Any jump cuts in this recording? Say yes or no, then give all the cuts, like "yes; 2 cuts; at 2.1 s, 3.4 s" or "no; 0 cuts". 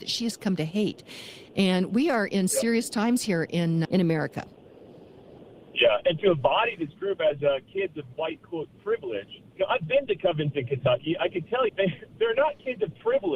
yes; 4 cuts; at 3.8 s, 6.0 s, 9.5 s, 11.7 s